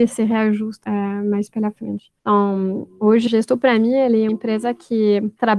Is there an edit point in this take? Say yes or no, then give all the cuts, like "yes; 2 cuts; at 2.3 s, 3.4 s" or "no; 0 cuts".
yes; 3 cuts; at 2.2 s, 3.3 s, 4.3 s